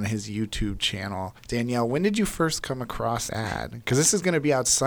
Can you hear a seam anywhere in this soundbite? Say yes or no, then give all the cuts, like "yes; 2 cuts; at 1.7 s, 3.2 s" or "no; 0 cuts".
yes; 2 cuts; at 1.4 s, 3.3 s